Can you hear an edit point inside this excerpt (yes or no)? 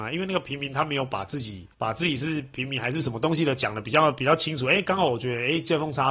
yes